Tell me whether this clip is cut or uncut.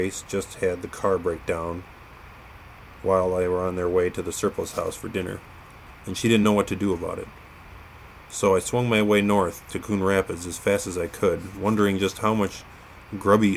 uncut